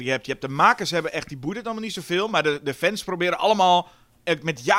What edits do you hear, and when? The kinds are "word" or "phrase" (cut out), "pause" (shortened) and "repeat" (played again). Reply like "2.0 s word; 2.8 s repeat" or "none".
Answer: none